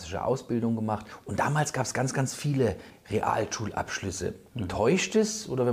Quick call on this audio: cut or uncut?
uncut